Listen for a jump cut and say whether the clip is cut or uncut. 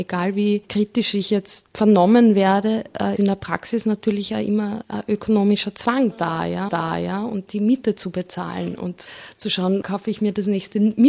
cut